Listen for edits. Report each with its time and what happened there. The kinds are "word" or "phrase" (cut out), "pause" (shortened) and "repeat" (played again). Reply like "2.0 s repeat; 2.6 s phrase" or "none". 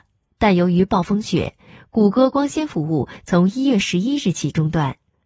none